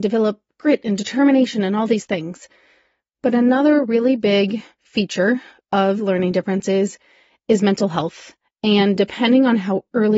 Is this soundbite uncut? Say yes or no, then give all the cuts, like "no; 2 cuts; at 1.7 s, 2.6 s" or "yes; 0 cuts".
yes; 0 cuts